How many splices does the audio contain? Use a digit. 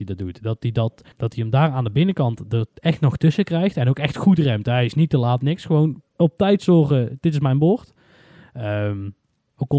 2